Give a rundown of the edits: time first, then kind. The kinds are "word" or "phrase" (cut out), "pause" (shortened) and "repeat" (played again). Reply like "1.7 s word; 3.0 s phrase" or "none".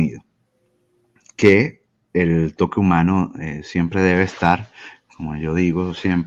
none